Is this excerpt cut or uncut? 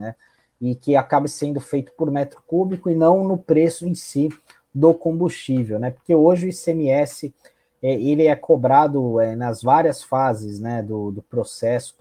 uncut